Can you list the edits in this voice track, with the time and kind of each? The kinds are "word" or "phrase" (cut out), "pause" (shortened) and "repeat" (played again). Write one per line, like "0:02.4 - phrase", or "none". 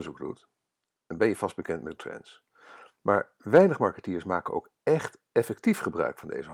0:02.0 - word